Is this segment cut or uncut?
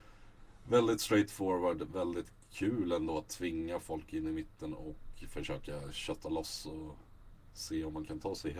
uncut